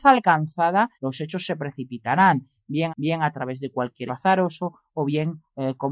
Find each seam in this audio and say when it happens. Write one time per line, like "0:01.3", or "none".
0:00.9
0:02.9
0:04.1